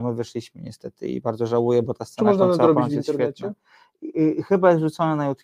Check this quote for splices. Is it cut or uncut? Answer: uncut